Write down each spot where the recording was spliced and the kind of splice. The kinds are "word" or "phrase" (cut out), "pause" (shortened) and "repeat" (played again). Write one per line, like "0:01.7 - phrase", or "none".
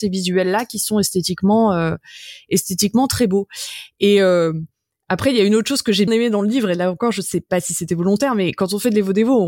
0:06.1 - word